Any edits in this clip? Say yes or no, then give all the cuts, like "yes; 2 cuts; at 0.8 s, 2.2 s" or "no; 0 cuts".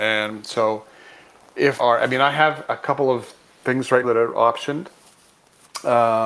yes; 3 cuts; at 1.8 s, 2.6 s, 4.0 s